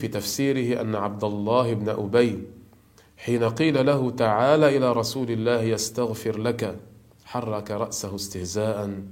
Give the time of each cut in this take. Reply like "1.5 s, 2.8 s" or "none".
none

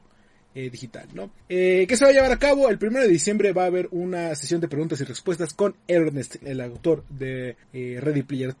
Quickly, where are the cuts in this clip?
1.4 s, 6.4 s, 7.6 s

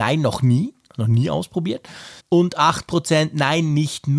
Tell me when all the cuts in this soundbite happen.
2.2 s

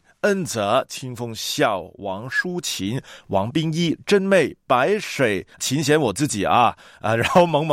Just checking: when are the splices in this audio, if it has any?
5.5 s

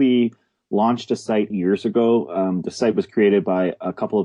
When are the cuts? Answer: 1.5 s

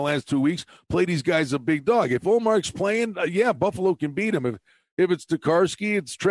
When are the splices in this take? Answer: none

